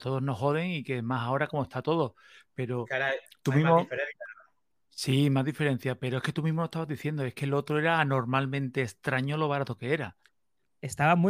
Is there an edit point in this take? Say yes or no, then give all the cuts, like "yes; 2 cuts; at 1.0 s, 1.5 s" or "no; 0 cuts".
no; 0 cuts